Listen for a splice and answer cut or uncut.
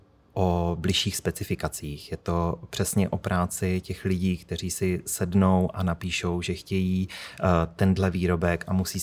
uncut